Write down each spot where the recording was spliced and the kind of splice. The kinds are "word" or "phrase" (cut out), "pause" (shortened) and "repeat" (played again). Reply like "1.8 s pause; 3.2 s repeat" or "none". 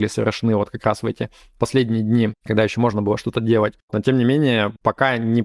none